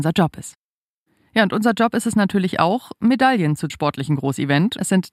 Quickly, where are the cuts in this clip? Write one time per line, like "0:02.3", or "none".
0:03.7